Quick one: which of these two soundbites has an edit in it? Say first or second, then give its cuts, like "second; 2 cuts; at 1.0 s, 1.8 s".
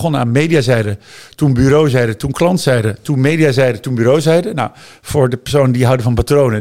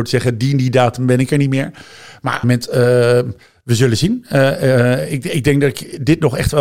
second; 1 cut; at 2.4 s